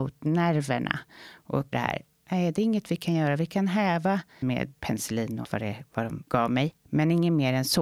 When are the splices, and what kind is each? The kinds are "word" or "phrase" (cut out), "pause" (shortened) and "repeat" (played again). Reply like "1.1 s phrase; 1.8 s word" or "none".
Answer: 1.7 s word; 4.4 s word; 4.7 s word; 5.4 s word